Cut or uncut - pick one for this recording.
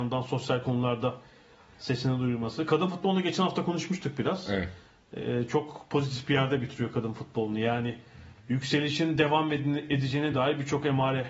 uncut